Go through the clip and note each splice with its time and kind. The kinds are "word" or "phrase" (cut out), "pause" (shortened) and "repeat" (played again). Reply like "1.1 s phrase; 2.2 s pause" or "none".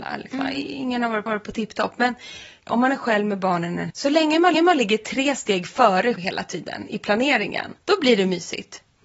1.3 s repeat; 2.7 s phrase; 3.9 s word; 4.5 s repeat; 6.2 s word; 7.8 s pause